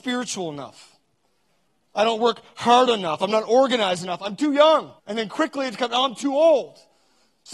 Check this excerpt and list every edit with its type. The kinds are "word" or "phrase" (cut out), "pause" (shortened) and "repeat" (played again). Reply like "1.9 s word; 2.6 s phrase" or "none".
1.7 s pause; 5.0 s pause